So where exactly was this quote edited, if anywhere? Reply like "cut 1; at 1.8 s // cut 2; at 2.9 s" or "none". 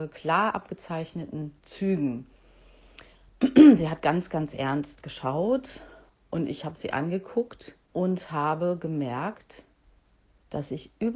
cut 1; at 1.6 s // cut 2; at 6.1 s // cut 3; at 7.8 s